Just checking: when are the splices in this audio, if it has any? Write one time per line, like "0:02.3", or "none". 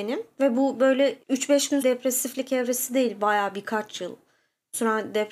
0:01.2
0:01.8